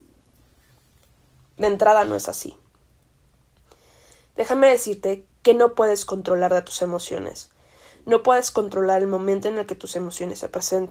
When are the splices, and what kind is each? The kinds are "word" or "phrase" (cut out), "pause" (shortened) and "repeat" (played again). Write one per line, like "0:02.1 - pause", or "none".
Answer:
none